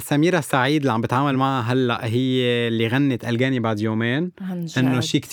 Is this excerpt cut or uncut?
uncut